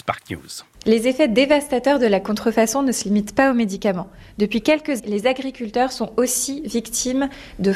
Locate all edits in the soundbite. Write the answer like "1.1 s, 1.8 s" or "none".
5.0 s